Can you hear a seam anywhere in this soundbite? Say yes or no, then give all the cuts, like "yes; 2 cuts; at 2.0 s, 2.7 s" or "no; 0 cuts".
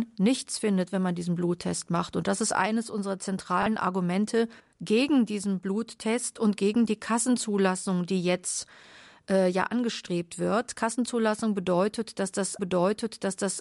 yes; 2 cuts; at 4.6 s, 12.6 s